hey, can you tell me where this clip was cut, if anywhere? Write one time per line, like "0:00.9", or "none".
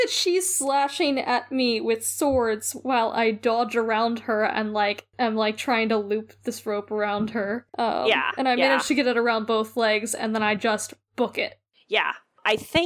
none

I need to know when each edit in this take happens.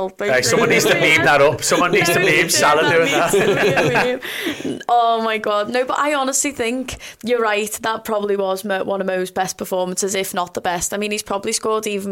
none

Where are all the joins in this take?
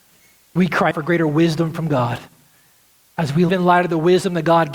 0:00.9
0:03.5

